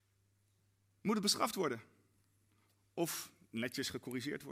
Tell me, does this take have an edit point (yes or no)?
no